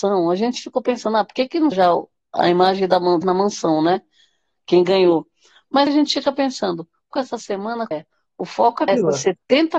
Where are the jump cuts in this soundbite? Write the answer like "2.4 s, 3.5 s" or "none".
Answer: 1.7 s, 3.2 s, 5.9 s, 7.1 s, 7.9 s, 8.9 s